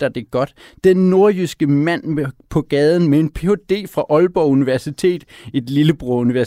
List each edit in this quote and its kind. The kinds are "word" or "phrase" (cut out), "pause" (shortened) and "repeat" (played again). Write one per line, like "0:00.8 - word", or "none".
none